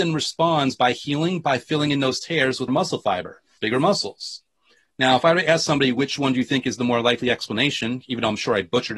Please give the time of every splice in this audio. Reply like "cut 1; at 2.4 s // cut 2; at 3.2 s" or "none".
cut 1; at 2.7 s // cut 2; at 3.6 s